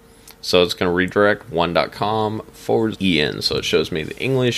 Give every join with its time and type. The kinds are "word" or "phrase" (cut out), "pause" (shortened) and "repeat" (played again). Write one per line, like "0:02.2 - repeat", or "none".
0:02.9 - word